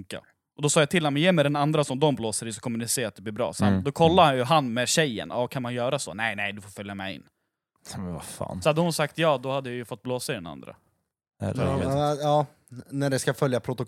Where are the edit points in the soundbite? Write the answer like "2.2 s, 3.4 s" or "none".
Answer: none